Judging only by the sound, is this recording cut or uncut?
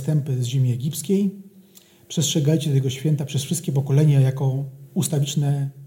uncut